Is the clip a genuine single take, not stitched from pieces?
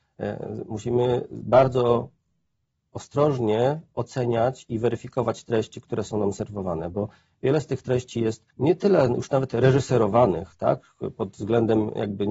no; 1 cut; at 8.5 s

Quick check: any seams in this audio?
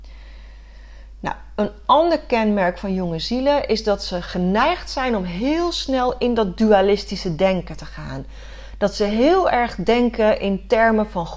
no; 0 cuts

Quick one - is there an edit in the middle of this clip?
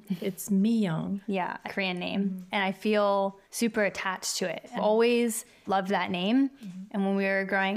yes; 5 cuts; at 1.2 s, 1.6 s, 3.4 s, 4.8 s, 5.7 s

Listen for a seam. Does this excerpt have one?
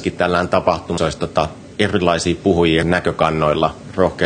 yes; 2 cuts; at 1.0 s, 2.8 s

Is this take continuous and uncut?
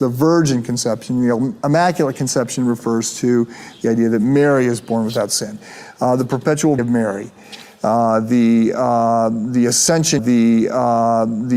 no; 2 cuts; at 6.8 s, 10.2 s

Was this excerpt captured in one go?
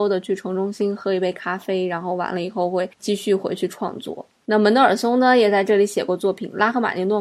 no; 1 cut; at 2.9 s

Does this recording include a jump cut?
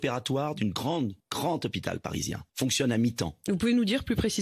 yes; 2 cuts; at 1.2 s, 2.5 s

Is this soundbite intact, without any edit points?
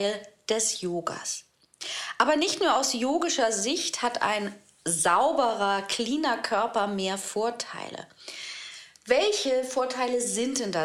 yes; 0 cuts

